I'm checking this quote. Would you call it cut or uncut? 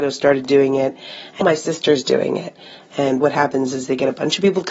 cut